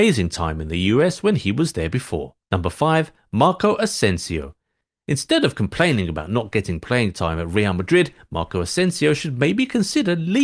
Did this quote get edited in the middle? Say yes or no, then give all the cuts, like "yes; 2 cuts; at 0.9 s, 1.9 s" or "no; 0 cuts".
yes; 1 cut; at 2.4 s